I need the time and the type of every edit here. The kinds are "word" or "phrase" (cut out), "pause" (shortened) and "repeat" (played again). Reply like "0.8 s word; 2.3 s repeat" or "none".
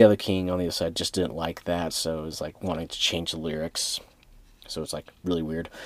none

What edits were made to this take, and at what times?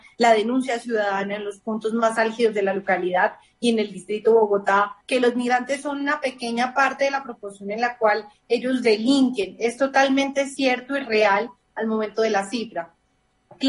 5.0 s pause

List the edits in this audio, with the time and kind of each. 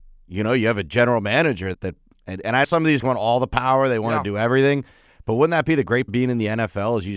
1.7 s word; 2.6 s word; 3.0 s word; 6.1 s word

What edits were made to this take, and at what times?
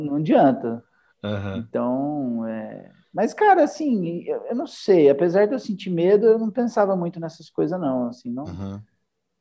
none

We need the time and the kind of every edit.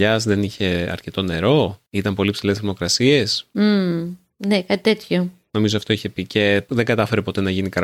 1.9 s pause

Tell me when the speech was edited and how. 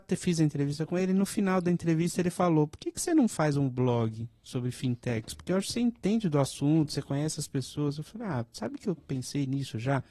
none

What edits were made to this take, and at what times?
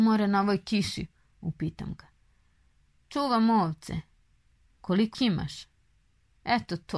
5.1 s word

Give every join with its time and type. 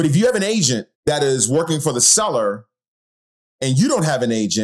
0.9 s pause

